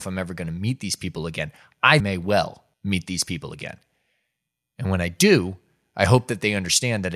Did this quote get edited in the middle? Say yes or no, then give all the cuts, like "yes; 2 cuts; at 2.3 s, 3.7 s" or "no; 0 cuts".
yes; 2 cuts; at 2.0 s, 2.7 s